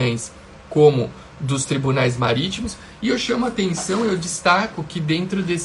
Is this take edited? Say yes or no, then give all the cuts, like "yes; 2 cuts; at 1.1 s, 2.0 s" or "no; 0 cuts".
no; 0 cuts